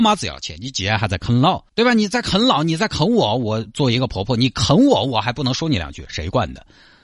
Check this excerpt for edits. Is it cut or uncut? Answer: cut